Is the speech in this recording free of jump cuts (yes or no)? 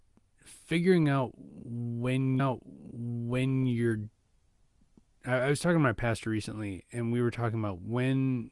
no